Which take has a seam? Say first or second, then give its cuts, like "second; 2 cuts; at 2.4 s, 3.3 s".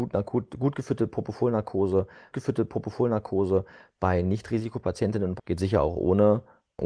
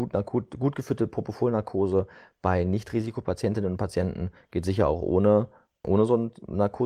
first; 2 cuts; at 2.3 s, 5.4 s